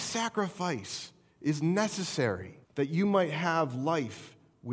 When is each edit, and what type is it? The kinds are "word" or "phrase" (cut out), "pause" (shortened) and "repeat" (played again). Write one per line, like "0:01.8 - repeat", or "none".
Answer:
0:02.6 - pause